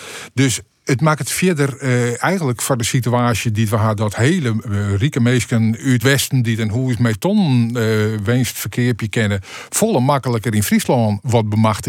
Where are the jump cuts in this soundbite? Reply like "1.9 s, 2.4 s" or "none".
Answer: 4.6 s, 6.0 s